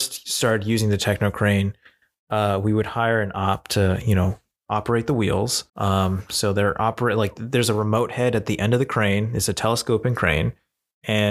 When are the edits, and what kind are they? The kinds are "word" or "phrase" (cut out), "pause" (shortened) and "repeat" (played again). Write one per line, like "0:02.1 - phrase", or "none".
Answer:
0:05.7 - pause